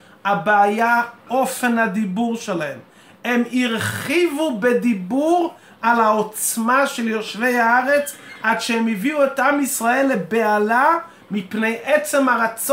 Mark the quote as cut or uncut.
uncut